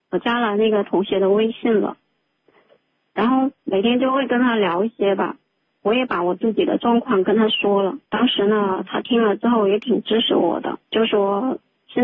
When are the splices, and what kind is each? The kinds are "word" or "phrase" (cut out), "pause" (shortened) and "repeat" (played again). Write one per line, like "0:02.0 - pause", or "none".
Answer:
0:03.6 - pause
0:08.0 - pause
0:10.8 - pause